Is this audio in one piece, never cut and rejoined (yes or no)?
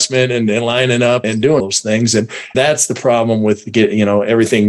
no